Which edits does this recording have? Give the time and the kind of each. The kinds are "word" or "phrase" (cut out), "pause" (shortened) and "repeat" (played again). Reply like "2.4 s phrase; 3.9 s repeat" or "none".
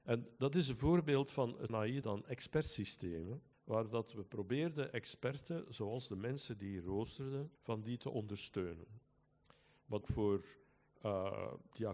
1.7 s phrase; 2.0 s phrase; 3.5 s pause; 7.6 s pause; 10.0 s phrase